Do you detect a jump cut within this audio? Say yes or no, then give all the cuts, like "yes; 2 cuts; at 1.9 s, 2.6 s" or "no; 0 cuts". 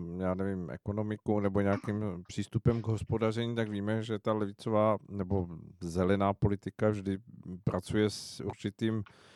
no; 0 cuts